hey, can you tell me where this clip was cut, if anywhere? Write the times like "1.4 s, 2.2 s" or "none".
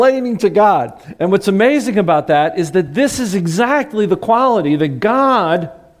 none